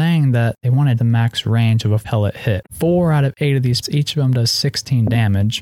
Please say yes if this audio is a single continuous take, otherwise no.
no